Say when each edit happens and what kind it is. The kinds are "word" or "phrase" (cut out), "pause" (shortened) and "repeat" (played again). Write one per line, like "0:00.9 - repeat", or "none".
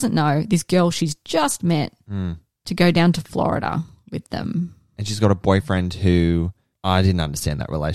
none